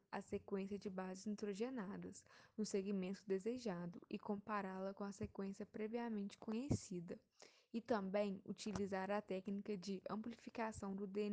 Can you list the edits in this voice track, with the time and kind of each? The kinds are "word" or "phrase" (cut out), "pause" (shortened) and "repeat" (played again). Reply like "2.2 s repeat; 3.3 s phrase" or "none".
none

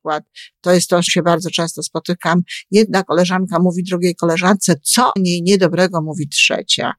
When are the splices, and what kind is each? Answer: 1.1 s word; 5.2 s word

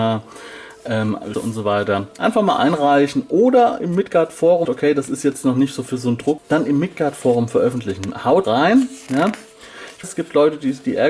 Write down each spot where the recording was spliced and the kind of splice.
1.3 s word; 4.6 s phrase; 6.4 s word; 8.4 s word; 10.0 s word

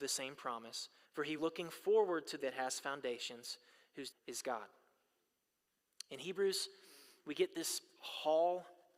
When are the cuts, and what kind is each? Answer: 1.0 s pause; 1.4 s word; 2.4 s word; 4.1 s phrase

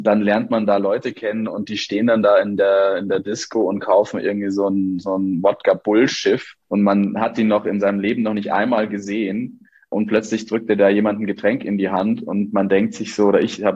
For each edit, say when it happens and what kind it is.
6.6 s pause

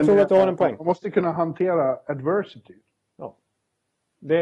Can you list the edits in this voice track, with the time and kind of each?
none

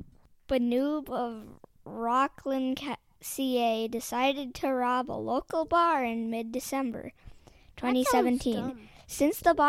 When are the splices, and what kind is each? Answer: none

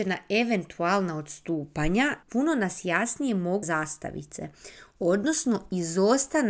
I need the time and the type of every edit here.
2.2 s pause; 3.6 s phrase

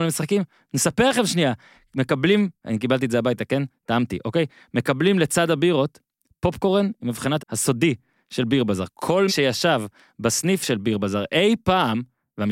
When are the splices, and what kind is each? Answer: 7.4 s word; 9.3 s word

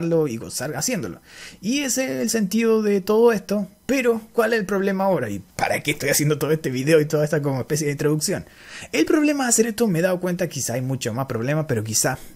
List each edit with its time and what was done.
5.5 s pause

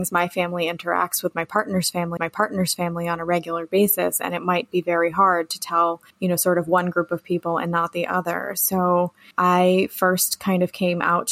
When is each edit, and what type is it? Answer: 2.2 s repeat; 6.1 s pause; 9.3 s pause

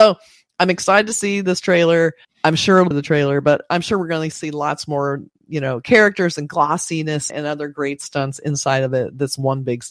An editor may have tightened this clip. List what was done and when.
2.2 s pause; 2.9 s phrase; 7.3 s word

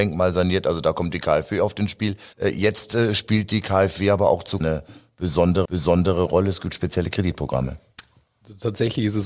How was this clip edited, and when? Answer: 2.3 s pause; 4.6 s word; 5.7 s repeat

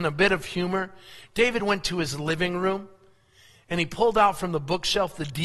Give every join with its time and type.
none

